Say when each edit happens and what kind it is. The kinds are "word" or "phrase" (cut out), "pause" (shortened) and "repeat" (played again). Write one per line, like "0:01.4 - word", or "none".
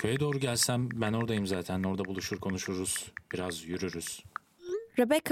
none